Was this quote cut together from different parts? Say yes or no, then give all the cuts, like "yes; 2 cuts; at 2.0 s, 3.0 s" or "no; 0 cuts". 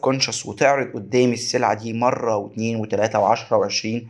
no; 0 cuts